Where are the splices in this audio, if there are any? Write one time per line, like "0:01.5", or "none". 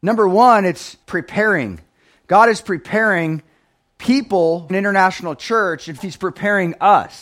0:01.0
0:04.7
0:06.0